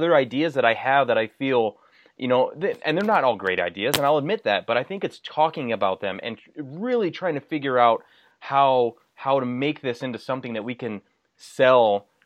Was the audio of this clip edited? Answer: no; 0 cuts

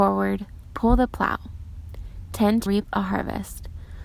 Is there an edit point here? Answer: yes; 1 cut; at 2.7 s

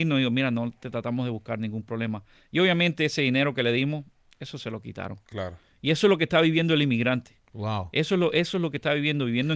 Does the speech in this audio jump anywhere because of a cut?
no; 0 cuts

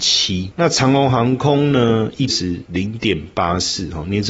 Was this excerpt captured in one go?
no; 1 cut; at 2.3 s

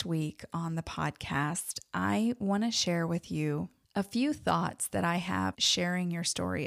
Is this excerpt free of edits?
no; 1 cut; at 5.5 s

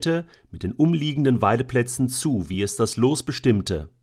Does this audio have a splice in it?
no; 0 cuts

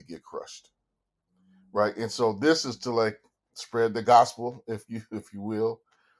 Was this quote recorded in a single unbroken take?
yes; 0 cuts

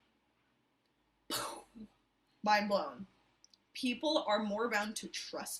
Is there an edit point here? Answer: no; 0 cuts

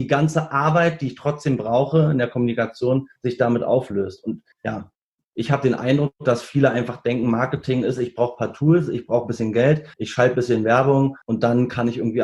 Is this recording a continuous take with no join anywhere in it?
no; 4 cuts; at 3.2 s, 4.5 s, 9.9 s, 11.2 s

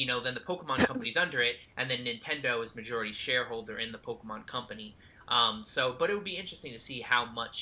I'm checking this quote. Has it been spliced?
no; 0 cuts

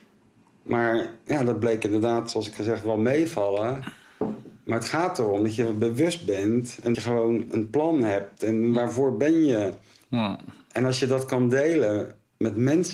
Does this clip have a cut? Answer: yes; 3 cuts; at 2.6 s, 6.9 s, 7.5 s

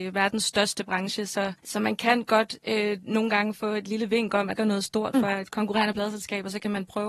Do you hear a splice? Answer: yes; 2 cuts; at 1.6 s, 4.6 s

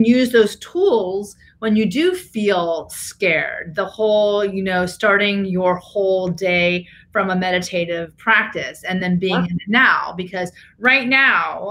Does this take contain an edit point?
no; 0 cuts

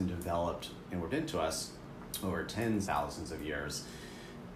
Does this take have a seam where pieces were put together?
yes; 2 cuts; at 1.1 s, 2.9 s

